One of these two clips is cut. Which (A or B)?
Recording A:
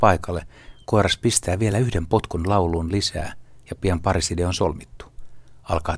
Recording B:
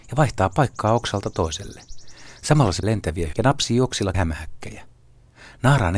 B